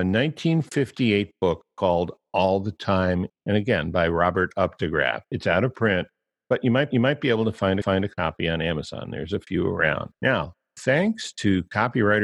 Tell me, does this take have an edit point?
yes; 5 cuts; at 3.3 s, 5.2 s, 6.9 s, 7.8 s, 10.1 s

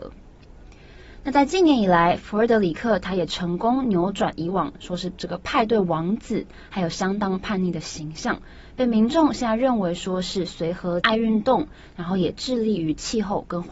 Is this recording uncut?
no; 1 cut; at 11.0 s

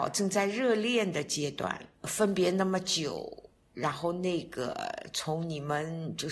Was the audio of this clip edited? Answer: yes; 1 cut; at 2.0 s

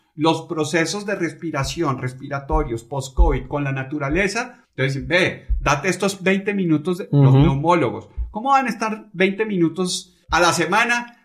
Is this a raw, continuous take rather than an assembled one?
no; 2 cuts; at 4.6 s, 10.2 s

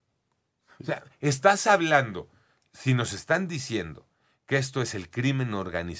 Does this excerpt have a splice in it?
no; 0 cuts

